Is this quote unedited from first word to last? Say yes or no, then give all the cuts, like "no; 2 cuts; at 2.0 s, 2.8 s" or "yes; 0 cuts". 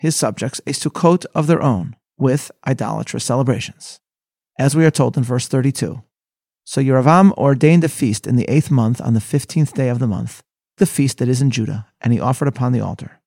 no; 1 cut; at 10.8 s